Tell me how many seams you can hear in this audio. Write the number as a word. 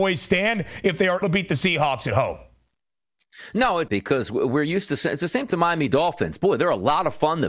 three